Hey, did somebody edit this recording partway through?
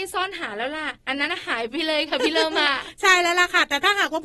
yes; 1 cut; at 1.0 s

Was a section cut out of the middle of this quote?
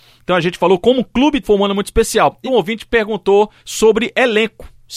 yes; 3 cuts; at 1.4 s, 2.5 s, 3.6 s

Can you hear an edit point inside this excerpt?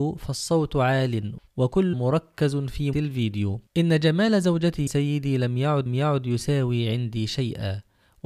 yes; 5 cuts; at 1.9 s, 2.9 s, 3.7 s, 4.9 s, 5.9 s

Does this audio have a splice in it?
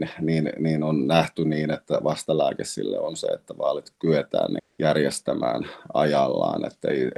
no; 0 cuts

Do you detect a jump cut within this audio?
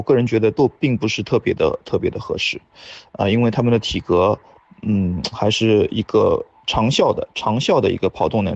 no; 0 cuts

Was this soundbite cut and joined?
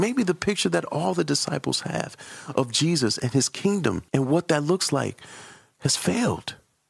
yes; 1 cut; at 4.1 s

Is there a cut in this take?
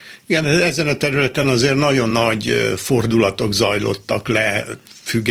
no; 0 cuts

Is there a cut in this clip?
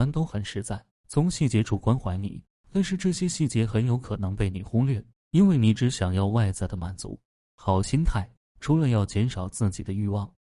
no; 0 cuts

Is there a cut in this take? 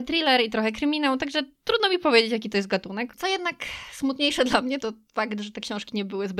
no; 0 cuts

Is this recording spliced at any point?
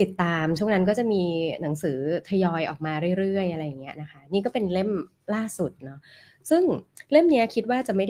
no; 0 cuts

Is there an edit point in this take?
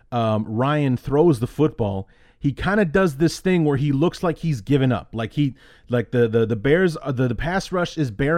no; 0 cuts

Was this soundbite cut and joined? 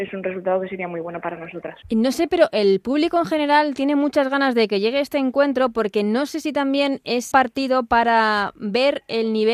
yes; 2 cuts; at 1.8 s, 7.3 s

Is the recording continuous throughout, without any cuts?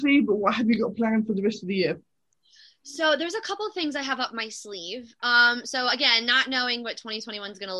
yes; 0 cuts

